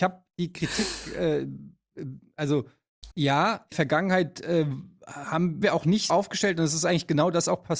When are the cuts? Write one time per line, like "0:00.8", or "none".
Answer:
0:03.1
0:03.7
0:05.6
0:06.1